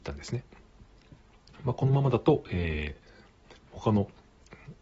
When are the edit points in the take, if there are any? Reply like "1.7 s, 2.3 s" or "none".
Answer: 3.6 s